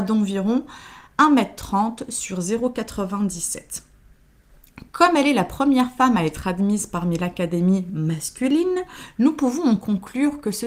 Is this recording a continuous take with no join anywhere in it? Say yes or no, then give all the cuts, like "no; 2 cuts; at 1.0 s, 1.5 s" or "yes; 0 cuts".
yes; 0 cuts